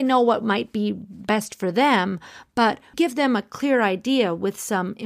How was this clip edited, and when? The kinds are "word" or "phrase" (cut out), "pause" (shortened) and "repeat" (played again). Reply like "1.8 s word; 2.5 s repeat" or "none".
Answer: 2.9 s word